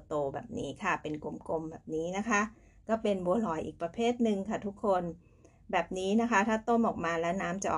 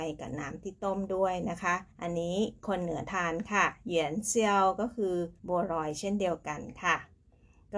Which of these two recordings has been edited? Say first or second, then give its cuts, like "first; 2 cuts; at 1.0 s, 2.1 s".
second; 2 cuts; at 1.9 s, 5.4 s